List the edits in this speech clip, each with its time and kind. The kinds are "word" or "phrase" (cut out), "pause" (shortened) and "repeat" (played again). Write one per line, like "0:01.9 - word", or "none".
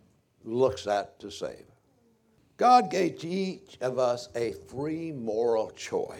none

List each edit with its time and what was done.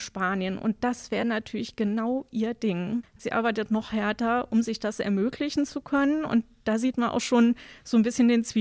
none

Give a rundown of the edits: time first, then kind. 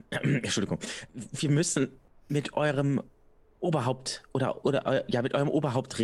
0:01.1 - word
0:02.1 - word

